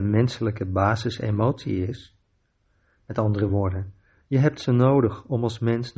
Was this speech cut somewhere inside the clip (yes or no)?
no